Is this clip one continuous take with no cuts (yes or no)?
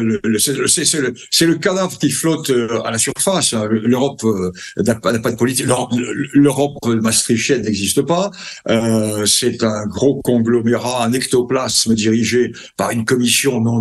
yes